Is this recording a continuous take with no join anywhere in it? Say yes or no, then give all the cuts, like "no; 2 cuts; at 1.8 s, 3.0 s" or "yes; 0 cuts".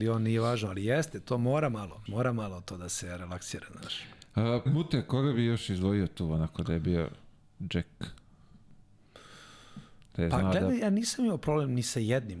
no; 2 cuts; at 2.1 s, 4.7 s